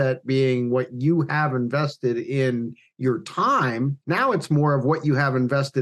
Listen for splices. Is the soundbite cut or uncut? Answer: cut